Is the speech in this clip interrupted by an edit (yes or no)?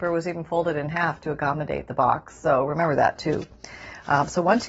no